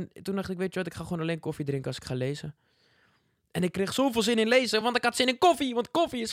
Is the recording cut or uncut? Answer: uncut